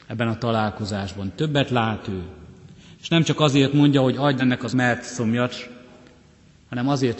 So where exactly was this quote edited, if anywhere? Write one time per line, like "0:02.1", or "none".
0:04.4
0:04.7